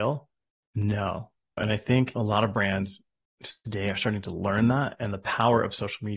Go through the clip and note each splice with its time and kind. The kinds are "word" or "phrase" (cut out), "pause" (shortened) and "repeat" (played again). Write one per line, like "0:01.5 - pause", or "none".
none